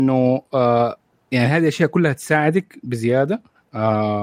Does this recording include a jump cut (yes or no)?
no